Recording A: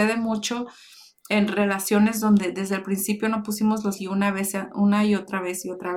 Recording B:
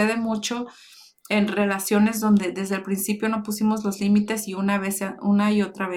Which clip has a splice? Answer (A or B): A